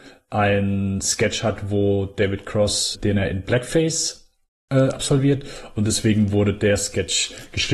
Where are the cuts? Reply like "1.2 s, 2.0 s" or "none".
2.9 s